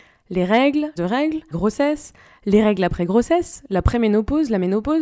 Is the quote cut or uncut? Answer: cut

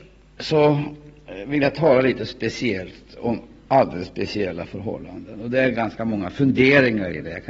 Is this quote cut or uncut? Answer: uncut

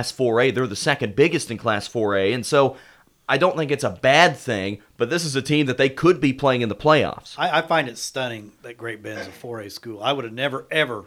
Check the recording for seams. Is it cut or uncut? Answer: uncut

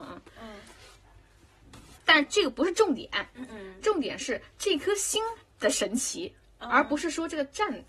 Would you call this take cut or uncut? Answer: uncut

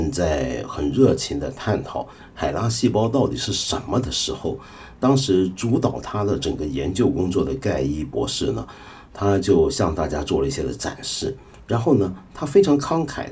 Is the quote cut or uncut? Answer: uncut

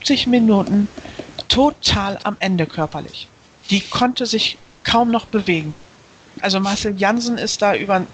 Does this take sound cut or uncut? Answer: uncut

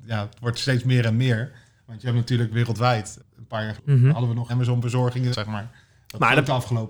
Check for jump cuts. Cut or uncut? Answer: cut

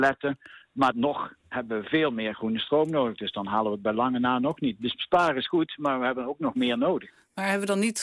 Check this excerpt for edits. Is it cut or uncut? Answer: cut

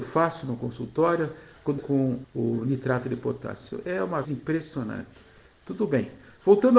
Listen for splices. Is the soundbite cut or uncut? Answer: cut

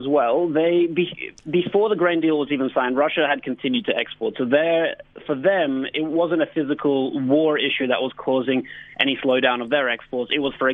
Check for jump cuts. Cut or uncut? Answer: uncut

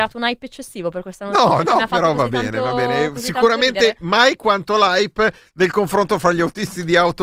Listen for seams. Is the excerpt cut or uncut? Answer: uncut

